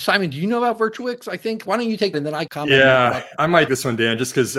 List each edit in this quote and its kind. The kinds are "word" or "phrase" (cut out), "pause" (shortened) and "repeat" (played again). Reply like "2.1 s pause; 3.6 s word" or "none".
1.6 s word; 2.1 s word; 2.5 s word; 3.4 s word; 3.7 s word